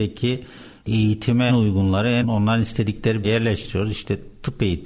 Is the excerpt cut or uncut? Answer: cut